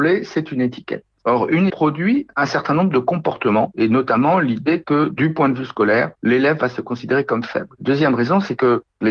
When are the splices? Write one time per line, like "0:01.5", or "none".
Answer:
0:01.7